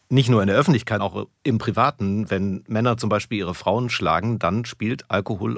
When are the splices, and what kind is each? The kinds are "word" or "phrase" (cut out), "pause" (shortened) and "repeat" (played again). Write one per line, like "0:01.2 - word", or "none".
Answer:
0:01.0 - word